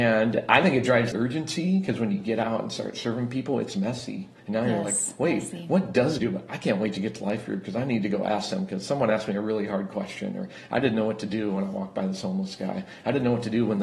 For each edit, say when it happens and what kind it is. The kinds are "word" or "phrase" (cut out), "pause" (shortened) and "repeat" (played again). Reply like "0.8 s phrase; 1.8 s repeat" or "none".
1.1 s word; 4.4 s pause; 6.2 s phrase